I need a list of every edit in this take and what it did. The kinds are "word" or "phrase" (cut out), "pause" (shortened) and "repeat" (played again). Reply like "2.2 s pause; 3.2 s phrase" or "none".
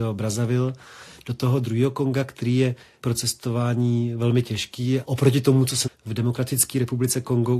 3.0 s word; 5.0 s word; 5.9 s word